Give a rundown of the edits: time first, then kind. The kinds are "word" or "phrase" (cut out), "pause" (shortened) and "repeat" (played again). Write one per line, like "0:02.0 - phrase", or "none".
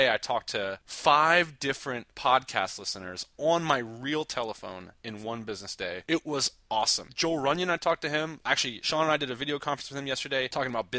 none